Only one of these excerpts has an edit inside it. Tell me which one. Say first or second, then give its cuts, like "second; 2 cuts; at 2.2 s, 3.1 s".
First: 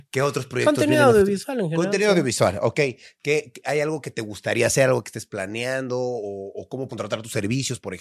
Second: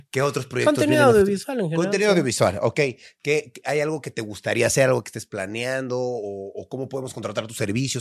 first; 1 cut; at 6.9 s